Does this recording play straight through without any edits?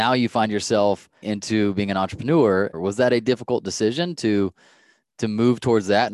no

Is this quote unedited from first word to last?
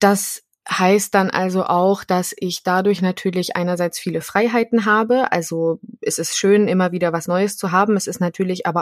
yes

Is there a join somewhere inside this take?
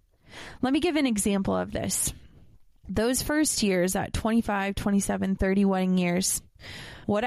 no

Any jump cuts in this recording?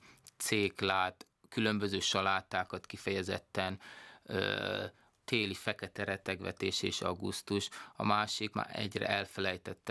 yes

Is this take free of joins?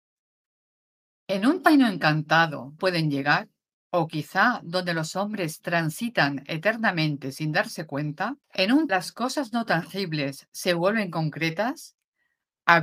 no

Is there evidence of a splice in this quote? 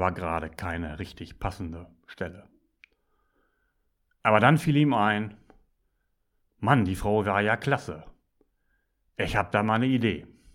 no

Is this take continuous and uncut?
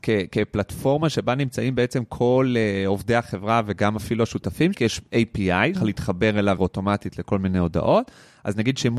no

